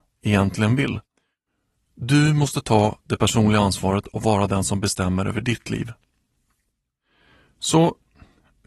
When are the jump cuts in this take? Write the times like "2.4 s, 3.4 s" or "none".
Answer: none